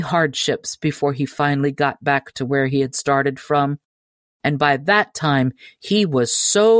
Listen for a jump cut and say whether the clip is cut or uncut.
uncut